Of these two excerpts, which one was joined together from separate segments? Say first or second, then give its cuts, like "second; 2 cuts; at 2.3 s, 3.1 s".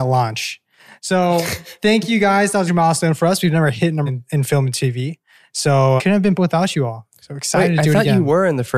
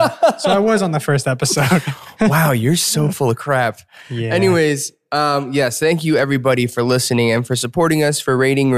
first; 4 cuts; at 2.7 s, 4.1 s, 6.0 s, 6.4 s